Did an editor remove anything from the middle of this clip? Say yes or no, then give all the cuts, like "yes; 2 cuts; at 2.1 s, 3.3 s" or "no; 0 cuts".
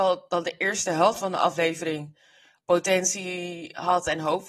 no; 0 cuts